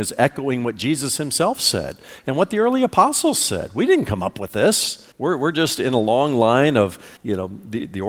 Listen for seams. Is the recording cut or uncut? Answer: cut